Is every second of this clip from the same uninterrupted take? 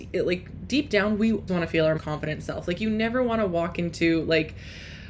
no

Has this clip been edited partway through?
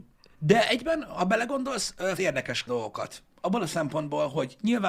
yes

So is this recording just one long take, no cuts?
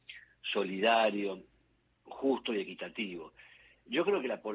yes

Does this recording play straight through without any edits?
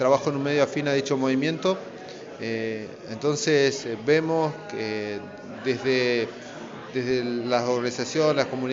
no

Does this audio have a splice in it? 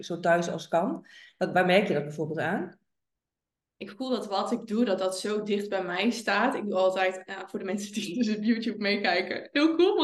no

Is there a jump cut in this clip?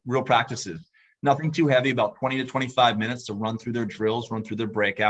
no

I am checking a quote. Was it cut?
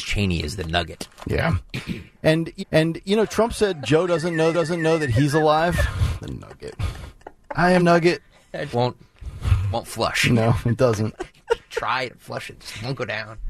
yes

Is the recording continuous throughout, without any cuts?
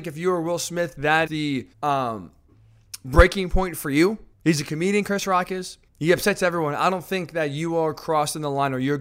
no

